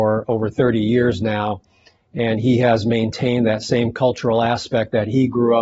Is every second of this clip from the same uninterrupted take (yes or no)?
yes